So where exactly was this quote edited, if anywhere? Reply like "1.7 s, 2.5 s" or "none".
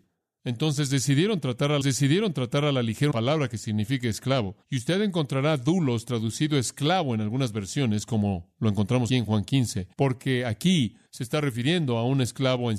1.8 s, 3.1 s, 4.6 s, 9.1 s, 9.9 s, 11.1 s